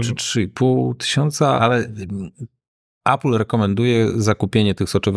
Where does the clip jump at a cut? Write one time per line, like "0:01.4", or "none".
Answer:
0:01.6